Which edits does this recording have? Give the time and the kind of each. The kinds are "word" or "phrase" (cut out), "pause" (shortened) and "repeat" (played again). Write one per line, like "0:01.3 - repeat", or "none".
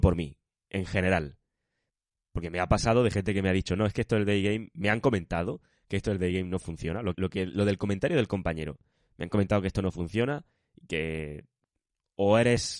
0:07.1 - word